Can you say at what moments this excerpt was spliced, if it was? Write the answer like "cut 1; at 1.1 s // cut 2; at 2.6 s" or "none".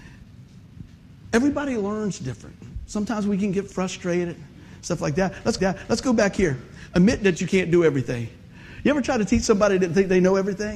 cut 1; at 5.6 s